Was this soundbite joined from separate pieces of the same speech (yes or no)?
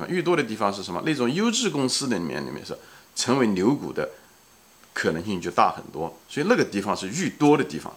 no